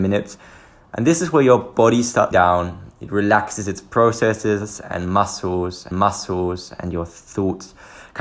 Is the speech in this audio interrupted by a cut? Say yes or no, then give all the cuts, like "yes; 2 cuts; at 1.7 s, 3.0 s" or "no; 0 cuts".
yes; 2 cuts; at 2.3 s, 5.9 s